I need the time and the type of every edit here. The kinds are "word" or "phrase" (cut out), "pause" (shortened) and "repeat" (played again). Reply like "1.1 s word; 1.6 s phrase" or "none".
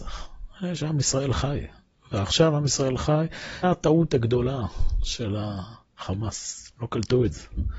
3.6 s word